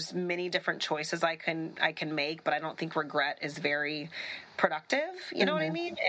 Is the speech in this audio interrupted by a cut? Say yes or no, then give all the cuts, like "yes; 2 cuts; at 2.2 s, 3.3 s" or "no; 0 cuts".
no; 0 cuts